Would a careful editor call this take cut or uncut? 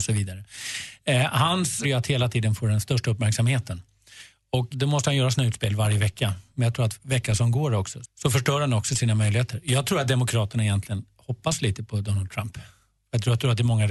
cut